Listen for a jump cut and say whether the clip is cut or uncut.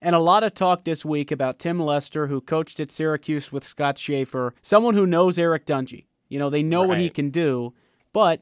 cut